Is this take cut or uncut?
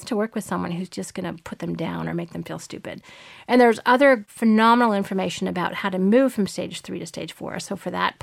uncut